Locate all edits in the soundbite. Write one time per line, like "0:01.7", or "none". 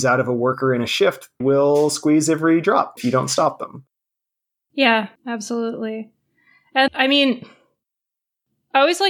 0:01.4
0:03.0
0:05.2
0:06.9